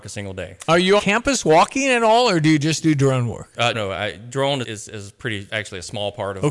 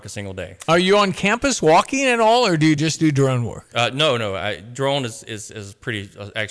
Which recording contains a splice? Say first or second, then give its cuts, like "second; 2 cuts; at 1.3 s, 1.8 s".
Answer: first; 4 cuts; at 1.0 s, 3.7 s, 4.6 s, 5.5 s